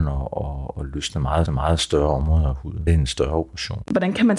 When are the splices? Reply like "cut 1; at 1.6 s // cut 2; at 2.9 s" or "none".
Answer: cut 1; at 1.5 s // cut 2; at 2.9 s

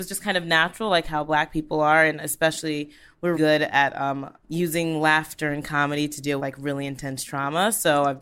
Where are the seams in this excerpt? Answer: cut 1; at 3.3 s // cut 2; at 4.4 s // cut 3; at 6.4 s

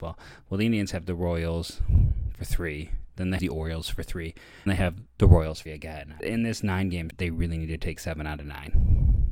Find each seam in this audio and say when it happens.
cut 1; at 3.4 s // cut 2; at 4.7 s // cut 3; at 5.7 s // cut 4; at 6.2 s // cut 5; at 7.1 s

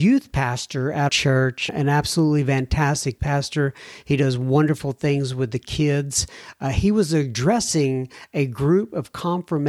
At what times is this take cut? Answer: cut 1; at 1.1 s // cut 2; at 1.7 s // cut 3; at 3.2 s

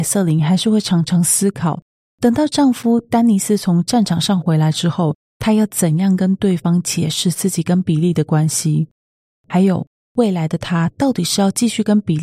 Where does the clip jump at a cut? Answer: none

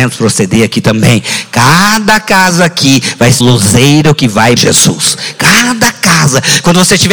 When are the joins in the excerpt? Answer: cut 1; at 3.4 s // cut 2; at 4.6 s

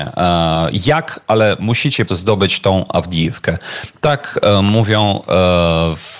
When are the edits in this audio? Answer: cut 1; at 2.1 s

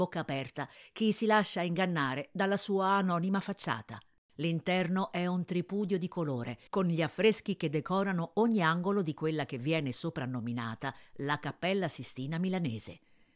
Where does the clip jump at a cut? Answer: cut 1; at 6.7 s

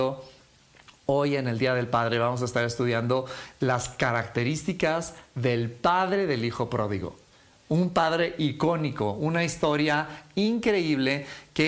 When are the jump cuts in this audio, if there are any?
none

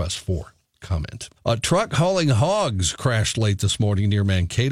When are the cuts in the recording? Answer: cut 1; at 1.4 s

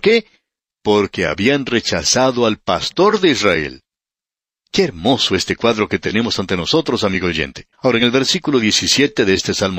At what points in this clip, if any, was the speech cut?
cut 1; at 7.7 s

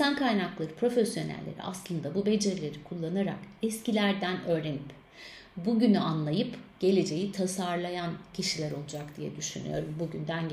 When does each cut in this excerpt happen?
none

